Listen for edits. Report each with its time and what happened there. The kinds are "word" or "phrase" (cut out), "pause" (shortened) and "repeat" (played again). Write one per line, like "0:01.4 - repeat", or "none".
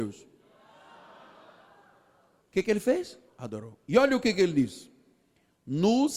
0:03.3 - pause